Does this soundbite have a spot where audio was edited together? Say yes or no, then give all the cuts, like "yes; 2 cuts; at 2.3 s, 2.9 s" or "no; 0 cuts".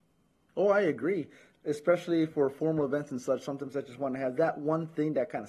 no; 0 cuts